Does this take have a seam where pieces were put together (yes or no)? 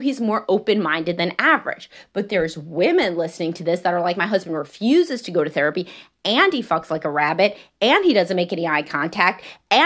no